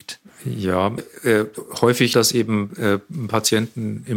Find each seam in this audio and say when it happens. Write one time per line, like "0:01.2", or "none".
0:01.0
0:02.1